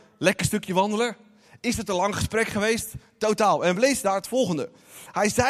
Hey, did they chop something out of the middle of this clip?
no; 0 cuts

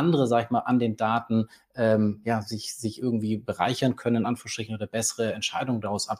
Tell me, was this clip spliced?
no; 0 cuts

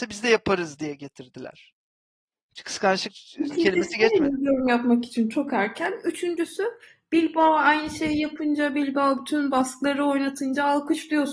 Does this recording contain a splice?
no; 0 cuts

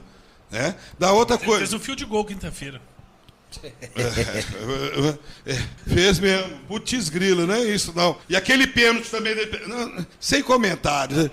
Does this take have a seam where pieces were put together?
yes; 3 cuts; at 5.8 s, 8.2 s, 10.1 s

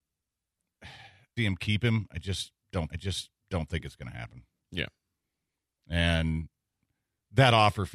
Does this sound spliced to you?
yes; 2 cuts; at 1.4 s, 2.9 s

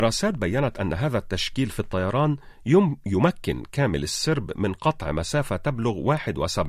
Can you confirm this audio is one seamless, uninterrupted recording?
yes; 0 cuts

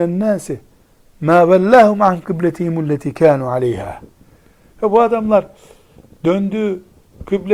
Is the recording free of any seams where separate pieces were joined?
yes; 0 cuts

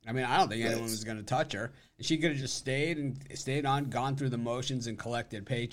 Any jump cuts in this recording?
no; 0 cuts

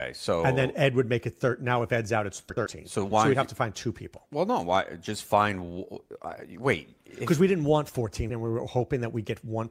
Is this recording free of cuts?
no; 1 cut; at 8.3 s

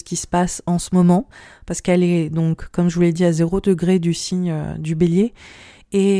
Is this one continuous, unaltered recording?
yes; 0 cuts

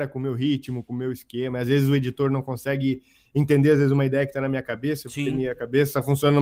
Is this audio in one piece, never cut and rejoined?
yes; 0 cuts

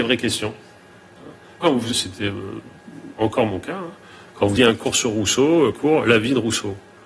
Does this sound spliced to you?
yes; 4 cuts; at 1.6 s, 1.9 s, 4.6 s, 5.7 s

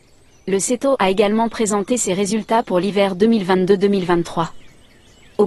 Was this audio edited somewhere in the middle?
no; 0 cuts

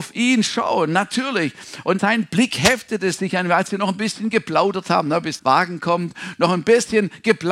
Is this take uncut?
no; 2 cuts; at 2.0 s, 5.4 s

